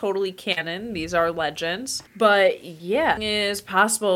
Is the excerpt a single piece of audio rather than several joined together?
no; 2 cuts; at 2.1 s, 3.2 s

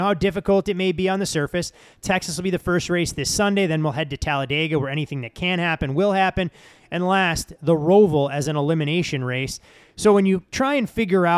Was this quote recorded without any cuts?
yes; 0 cuts

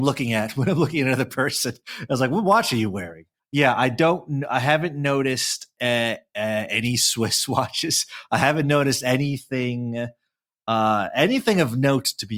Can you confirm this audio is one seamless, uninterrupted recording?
yes; 0 cuts

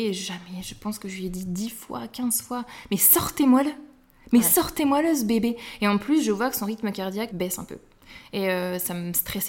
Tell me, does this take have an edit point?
yes; 1 cut; at 7.3 s

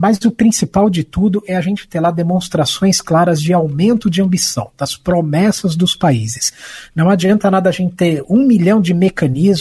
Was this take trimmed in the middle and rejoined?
no; 0 cuts

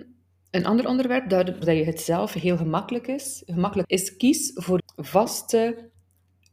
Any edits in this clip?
yes; 3 cuts; at 1.6 s, 3.8 s, 4.8 s

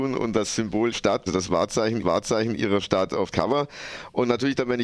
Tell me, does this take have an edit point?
yes; 4 cuts; at 0.9 s, 1.3 s, 2.0 s, 3.3 s

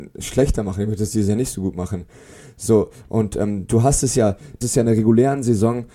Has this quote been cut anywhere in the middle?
yes; 1 cut; at 4.6 s

